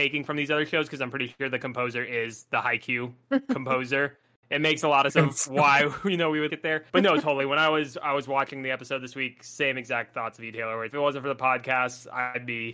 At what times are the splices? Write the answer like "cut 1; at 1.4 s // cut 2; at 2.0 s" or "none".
cut 1; at 4.4 s // cut 2; at 5.1 s // cut 3; at 6.5 s // cut 4; at 6.9 s // cut 5; at 10.9 s